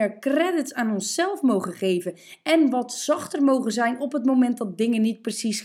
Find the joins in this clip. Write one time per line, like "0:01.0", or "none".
none